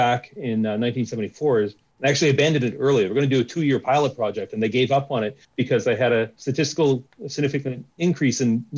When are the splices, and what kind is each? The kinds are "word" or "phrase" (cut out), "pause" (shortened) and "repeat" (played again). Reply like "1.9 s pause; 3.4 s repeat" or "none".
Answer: 5.4 s pause